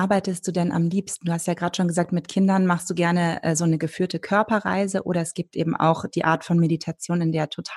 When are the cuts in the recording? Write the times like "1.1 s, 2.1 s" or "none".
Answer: none